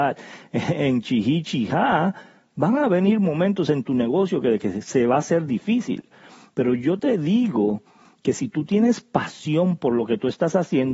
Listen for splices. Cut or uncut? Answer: uncut